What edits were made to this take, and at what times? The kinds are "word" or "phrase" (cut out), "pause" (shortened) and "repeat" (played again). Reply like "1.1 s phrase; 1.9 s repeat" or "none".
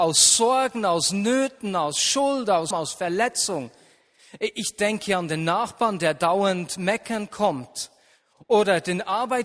2.7 s word